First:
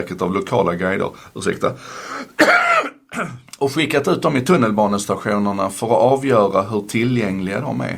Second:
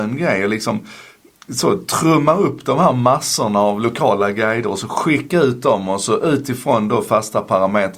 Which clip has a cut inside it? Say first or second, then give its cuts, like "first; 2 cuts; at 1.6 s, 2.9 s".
first; 1 cut; at 3.5 s